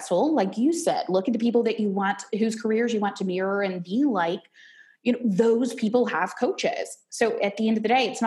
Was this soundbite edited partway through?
no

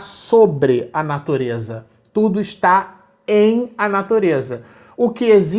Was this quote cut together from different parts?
no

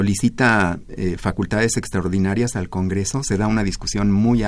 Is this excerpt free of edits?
yes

